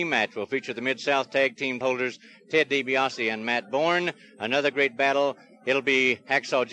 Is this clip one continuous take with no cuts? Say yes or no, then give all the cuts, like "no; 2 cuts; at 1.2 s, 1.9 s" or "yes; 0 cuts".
no; 1 cut; at 1.8 s